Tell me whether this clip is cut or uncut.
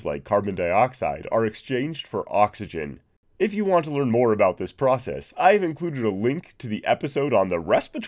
uncut